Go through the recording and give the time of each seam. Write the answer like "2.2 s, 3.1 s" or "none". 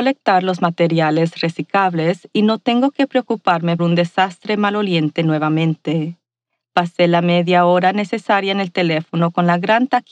3.8 s